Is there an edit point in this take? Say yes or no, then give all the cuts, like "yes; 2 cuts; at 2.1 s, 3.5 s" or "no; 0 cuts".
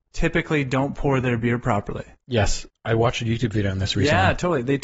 no; 0 cuts